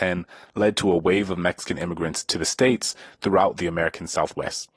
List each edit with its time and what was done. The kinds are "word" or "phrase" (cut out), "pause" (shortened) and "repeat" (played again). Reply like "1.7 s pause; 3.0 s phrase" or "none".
none